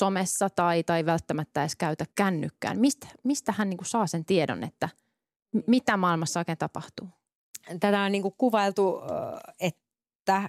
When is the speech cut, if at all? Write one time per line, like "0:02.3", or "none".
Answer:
0:02.1